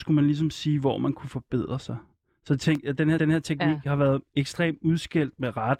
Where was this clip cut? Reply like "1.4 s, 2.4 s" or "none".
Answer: 3.2 s